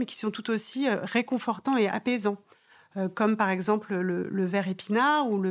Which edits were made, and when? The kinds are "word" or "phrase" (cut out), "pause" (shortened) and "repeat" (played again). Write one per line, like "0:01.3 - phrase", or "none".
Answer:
none